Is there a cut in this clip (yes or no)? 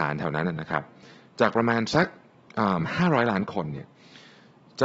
no